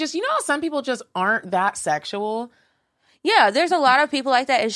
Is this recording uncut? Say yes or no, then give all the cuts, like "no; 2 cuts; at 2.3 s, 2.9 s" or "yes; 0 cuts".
yes; 0 cuts